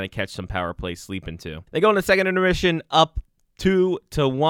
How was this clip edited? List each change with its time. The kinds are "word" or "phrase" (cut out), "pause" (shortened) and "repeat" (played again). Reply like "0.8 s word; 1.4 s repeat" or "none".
1.7 s pause